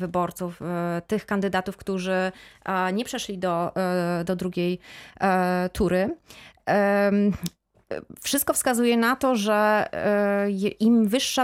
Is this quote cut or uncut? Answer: uncut